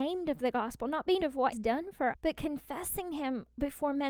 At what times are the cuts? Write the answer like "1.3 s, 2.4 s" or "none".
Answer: 1.2 s, 1.5 s, 2.1 s